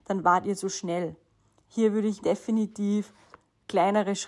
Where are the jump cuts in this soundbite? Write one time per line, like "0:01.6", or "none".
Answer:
0:02.2

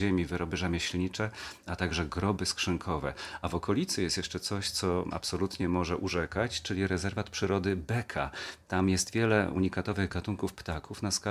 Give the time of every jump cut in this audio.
none

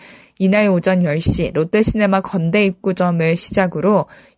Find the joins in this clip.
none

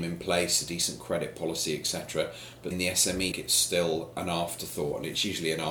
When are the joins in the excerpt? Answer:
0:02.7
0:03.3

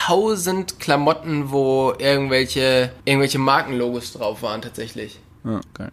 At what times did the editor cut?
0:03.0

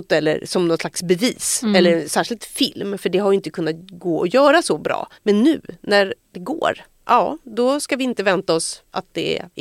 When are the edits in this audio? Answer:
0:05.2

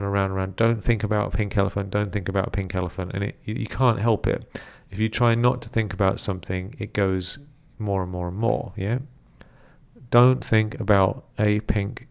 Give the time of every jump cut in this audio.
none

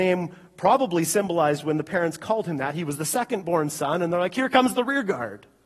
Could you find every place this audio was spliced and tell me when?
none

